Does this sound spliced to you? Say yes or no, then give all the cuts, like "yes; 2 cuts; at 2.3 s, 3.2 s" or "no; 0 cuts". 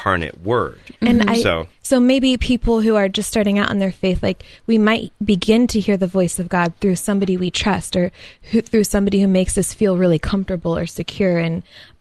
no; 0 cuts